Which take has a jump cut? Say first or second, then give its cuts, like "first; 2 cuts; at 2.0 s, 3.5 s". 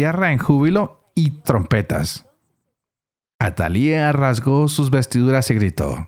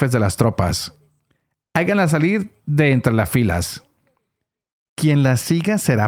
first; 1 cut; at 1.4 s